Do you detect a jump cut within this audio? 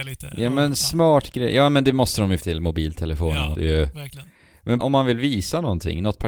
yes; 3 cuts; at 2.4 s, 3.5 s, 4.8 s

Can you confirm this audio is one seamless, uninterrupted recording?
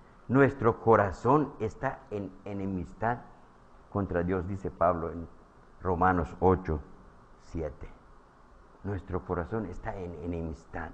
yes; 0 cuts

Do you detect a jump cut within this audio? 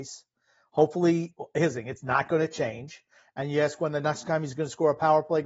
no; 0 cuts

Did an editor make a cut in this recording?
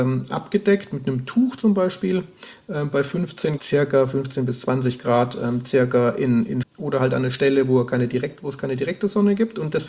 yes; 2 cuts; at 3.6 s, 6.6 s

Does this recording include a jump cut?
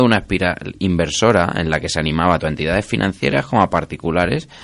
yes; 1 cut; at 2.4 s

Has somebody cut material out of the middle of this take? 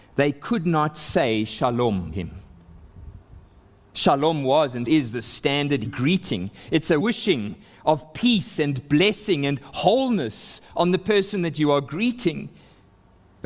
yes; 4 cuts; at 2.1 s, 4.9 s, 5.9 s, 7.0 s

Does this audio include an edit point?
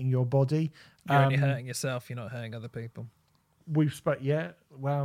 no; 0 cuts

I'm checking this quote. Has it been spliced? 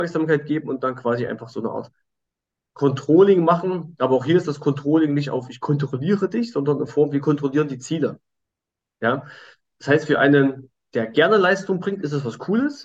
no; 0 cuts

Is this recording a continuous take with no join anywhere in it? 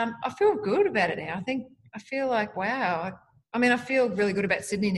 yes; 0 cuts

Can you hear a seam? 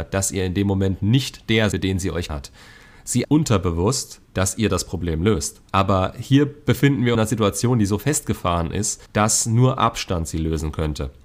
yes; 7 cuts; at 1.7 s, 2.3 s, 3.2 s, 4.2 s, 5.7 s, 7.1 s, 9.1 s

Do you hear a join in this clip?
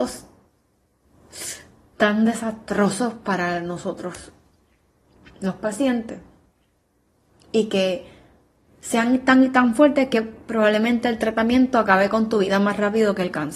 no; 0 cuts

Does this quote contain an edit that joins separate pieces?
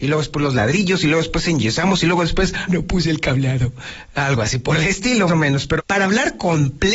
yes; 3 cuts; at 2.7 s, 5.3 s, 5.8 s

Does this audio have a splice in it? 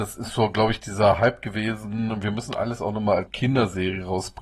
yes; 1 cut; at 3.3 s

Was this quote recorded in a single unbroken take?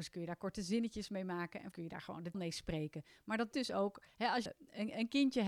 no; 4 cuts; at 1.7 s, 2.3 s, 3.5 s, 4.5 s

